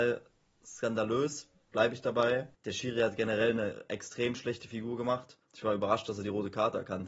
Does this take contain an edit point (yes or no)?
yes